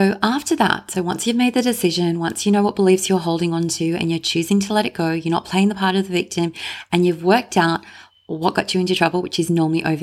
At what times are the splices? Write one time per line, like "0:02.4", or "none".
none